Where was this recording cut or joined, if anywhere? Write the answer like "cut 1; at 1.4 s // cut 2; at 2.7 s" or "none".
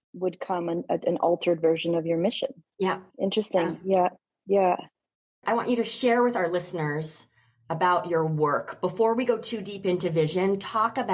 cut 1; at 3.1 s